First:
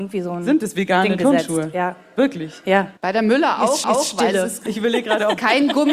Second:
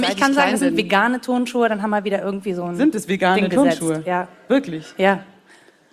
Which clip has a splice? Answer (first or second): first